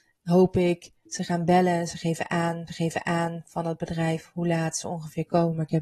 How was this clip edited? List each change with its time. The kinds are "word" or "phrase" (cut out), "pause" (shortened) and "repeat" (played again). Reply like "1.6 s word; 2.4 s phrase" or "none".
2.7 s repeat